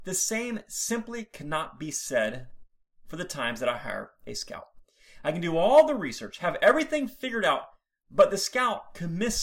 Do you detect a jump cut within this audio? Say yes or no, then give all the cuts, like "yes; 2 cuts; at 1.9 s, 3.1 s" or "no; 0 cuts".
no; 0 cuts